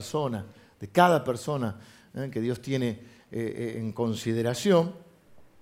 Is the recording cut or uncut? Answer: uncut